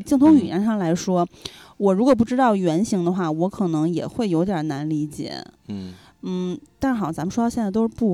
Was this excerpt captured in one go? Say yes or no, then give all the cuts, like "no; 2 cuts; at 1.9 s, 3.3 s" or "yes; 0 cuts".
yes; 0 cuts